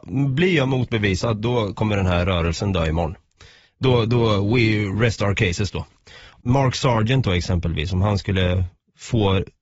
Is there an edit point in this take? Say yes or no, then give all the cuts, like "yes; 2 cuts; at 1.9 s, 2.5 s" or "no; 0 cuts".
no; 0 cuts